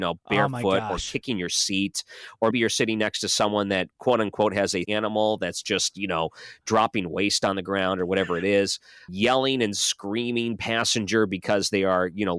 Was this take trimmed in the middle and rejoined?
yes; 3 cuts; at 2.5 s, 4.9 s, 9.1 s

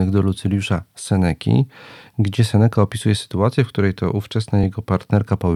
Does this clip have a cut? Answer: no; 0 cuts

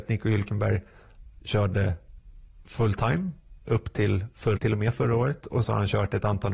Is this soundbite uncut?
no; 3 cuts; at 3.6 s, 4.6 s, 5.6 s

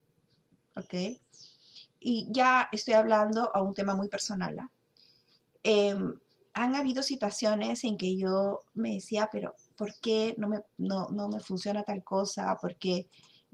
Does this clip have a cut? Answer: no; 0 cuts

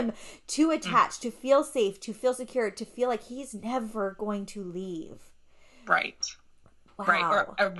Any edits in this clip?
no; 0 cuts

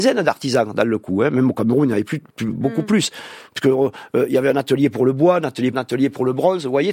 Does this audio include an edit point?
yes; 1 cut; at 5.7 s

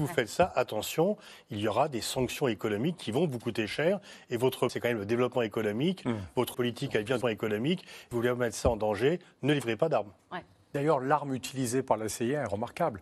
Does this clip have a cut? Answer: yes; 4 cuts; at 4.7 s, 6.5 s, 7.2 s, 8.1 s

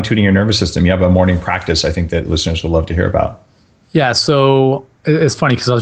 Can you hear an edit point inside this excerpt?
no; 0 cuts

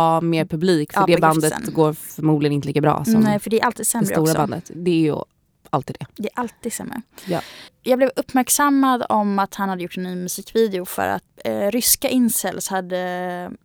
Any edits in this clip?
no; 0 cuts

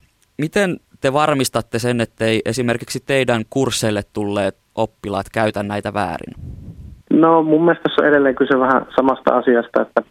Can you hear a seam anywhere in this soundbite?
yes; 2 cuts; at 4.6 s, 7.0 s

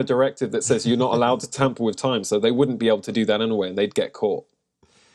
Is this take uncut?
yes; 0 cuts

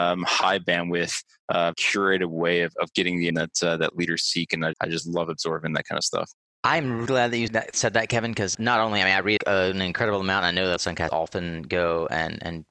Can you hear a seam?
yes; 9 cuts; at 1.7 s, 3.3 s, 4.7 s, 7.1 s, 7.5 s, 8.5 s, 9.4 s, 10.8 s, 11.1 s

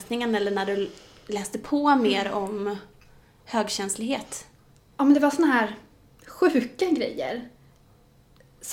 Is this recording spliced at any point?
no; 0 cuts

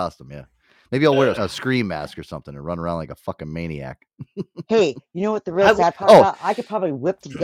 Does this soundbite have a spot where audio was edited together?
yes; 1 cut; at 1.3 s

